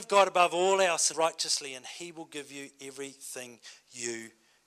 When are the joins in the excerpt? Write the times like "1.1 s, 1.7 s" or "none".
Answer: 1.1 s